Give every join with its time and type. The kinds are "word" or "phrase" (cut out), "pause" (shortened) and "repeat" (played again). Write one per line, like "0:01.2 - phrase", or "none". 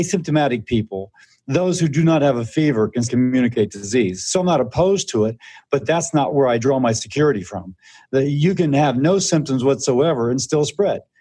0:03.1 - word